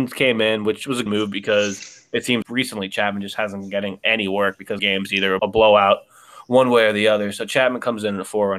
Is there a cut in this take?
yes; 4 cuts; at 1.1 s, 2.4 s, 4.8 s, 5.4 s

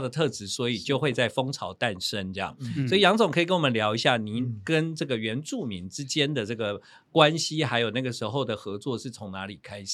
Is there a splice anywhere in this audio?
no; 0 cuts

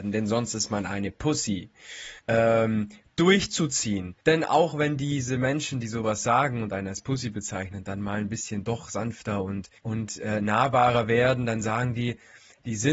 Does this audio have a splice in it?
yes; 3 cuts; at 2.2 s, 4.2 s, 9.8 s

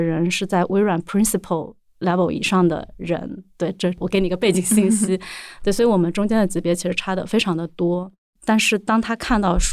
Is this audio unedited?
yes; 0 cuts

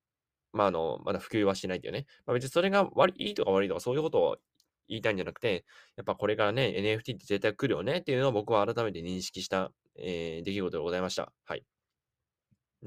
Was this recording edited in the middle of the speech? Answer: no; 0 cuts

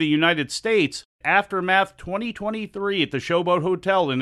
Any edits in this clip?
yes; 1 cut; at 1.2 s

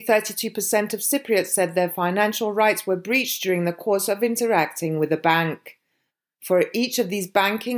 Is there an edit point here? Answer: no; 0 cuts

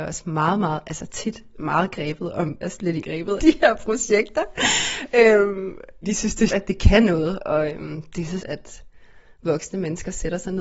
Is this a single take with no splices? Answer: no; 8 cuts; at 1.6 s, 2.6 s, 3.0 s, 3.4 s, 6.0 s, 6.5 s, 7.4 s, 8.4 s

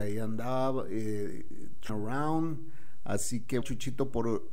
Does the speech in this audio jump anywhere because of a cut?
yes; 2 cuts; at 1.9 s, 3.6 s

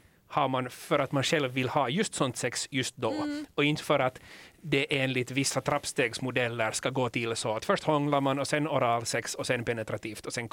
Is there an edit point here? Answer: no; 0 cuts

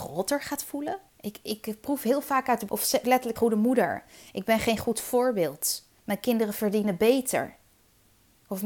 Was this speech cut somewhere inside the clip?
yes; 4 cuts; at 1.1 s, 2.7 s, 3.0 s, 3.4 s

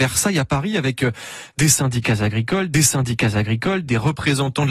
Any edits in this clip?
yes; 1 cut; at 2.7 s

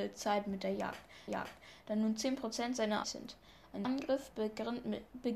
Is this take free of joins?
no; 3 cuts; at 1.3 s, 3.0 s, 3.8 s

